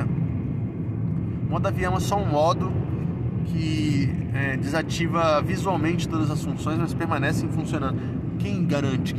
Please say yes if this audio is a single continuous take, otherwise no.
yes